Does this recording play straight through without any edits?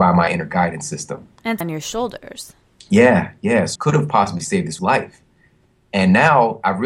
no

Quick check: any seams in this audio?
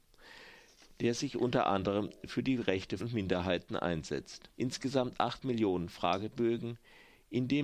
yes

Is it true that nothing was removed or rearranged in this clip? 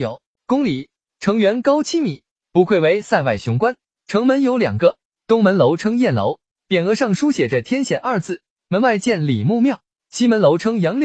yes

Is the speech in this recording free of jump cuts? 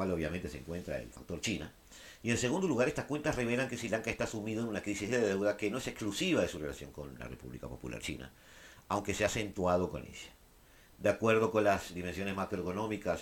yes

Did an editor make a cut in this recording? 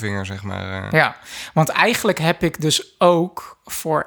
no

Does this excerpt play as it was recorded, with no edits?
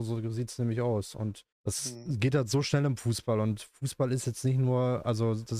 no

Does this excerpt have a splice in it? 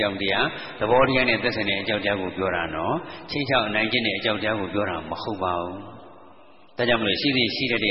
no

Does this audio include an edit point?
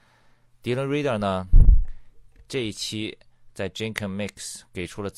no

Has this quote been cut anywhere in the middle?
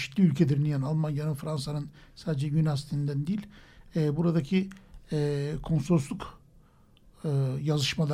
no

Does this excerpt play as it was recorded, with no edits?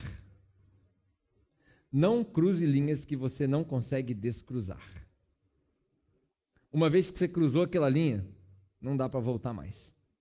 yes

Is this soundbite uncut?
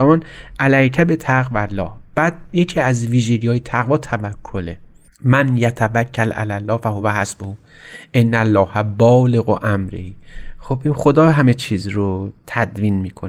yes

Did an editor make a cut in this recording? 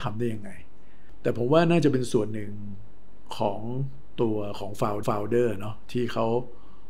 yes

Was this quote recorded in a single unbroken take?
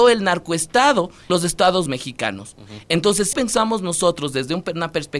no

